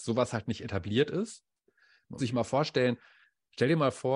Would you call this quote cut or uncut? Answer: cut